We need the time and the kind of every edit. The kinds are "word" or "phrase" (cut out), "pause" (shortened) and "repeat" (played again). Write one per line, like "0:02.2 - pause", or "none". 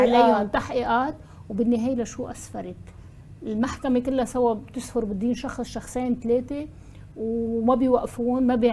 none